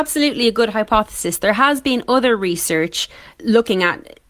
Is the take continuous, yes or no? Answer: no